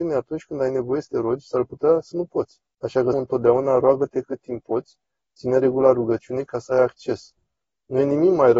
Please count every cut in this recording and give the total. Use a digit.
2